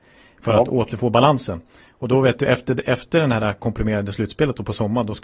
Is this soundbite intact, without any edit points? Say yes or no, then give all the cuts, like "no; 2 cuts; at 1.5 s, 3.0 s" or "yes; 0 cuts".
yes; 0 cuts